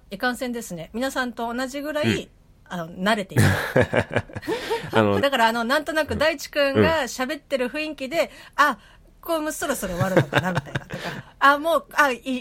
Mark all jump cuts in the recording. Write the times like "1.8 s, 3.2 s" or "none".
5.2 s